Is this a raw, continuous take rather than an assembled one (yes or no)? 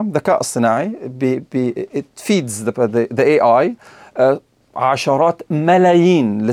yes